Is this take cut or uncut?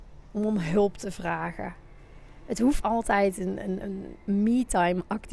cut